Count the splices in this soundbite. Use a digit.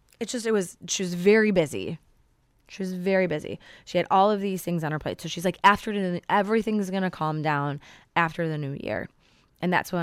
0